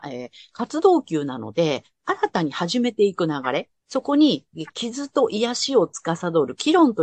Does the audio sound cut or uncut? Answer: cut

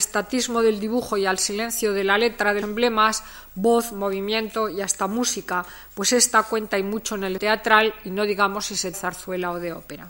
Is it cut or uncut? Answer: cut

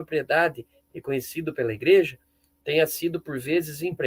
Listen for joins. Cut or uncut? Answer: uncut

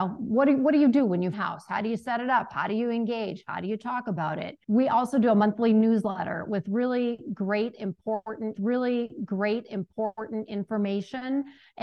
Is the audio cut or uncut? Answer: cut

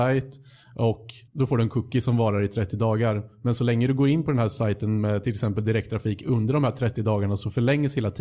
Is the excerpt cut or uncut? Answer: cut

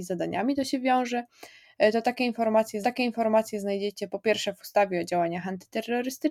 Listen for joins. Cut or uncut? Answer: cut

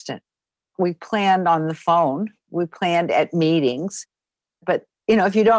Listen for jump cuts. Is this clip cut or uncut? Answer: uncut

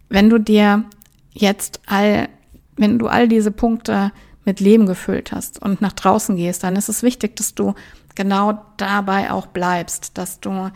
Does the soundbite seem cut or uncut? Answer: uncut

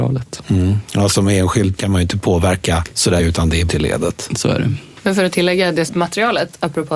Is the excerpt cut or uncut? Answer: cut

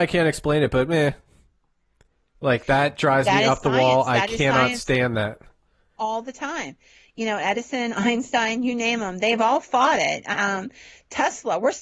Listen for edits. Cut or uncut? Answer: uncut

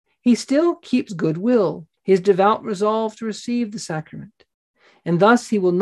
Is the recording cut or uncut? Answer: cut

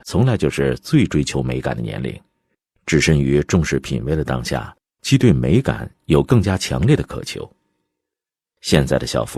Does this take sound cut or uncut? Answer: uncut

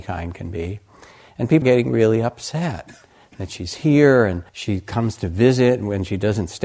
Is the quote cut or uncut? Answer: cut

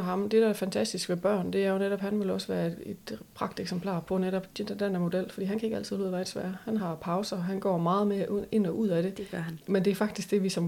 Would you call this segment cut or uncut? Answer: uncut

